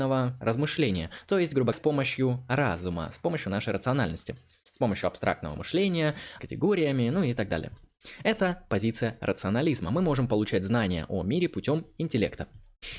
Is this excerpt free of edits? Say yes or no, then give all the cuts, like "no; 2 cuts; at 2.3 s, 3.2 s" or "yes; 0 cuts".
no; 2 cuts; at 1.7 s, 6.4 s